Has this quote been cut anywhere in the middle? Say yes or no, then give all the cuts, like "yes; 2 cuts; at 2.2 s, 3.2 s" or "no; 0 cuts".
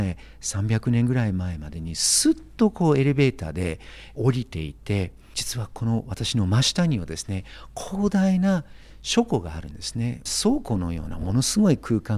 no; 0 cuts